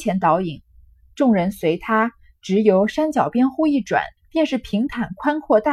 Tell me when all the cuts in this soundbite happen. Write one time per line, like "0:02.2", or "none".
0:04.2